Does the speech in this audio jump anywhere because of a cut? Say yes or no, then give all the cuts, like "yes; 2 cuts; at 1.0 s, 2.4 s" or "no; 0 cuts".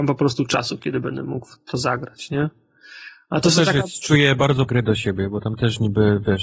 yes; 1 cut; at 4.7 s